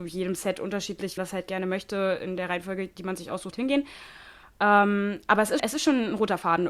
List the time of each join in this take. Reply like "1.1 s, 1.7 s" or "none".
1.2 s, 3.5 s, 5.6 s